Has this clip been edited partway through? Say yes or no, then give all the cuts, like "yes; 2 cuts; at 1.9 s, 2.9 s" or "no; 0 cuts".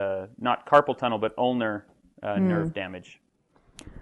no; 0 cuts